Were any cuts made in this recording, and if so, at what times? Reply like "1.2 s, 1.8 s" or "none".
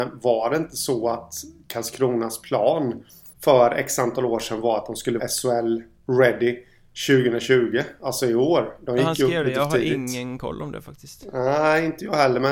3.3 s, 5.2 s